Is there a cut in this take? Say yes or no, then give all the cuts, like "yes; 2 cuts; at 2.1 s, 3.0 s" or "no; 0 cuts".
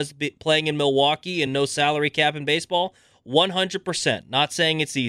no; 0 cuts